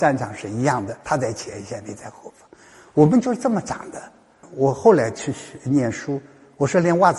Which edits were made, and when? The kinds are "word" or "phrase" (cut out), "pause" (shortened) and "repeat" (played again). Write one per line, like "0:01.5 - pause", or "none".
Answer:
0:01.0 - pause